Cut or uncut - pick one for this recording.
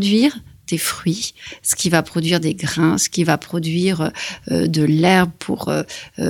uncut